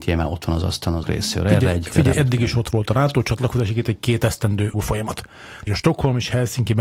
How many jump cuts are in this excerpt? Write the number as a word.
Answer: four